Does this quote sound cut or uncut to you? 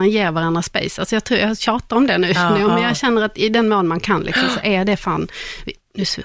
uncut